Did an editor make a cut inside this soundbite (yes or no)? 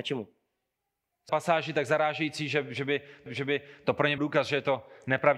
yes